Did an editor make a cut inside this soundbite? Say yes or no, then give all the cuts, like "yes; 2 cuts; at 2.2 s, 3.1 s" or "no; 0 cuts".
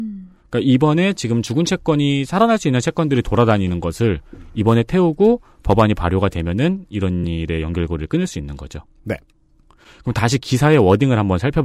no; 0 cuts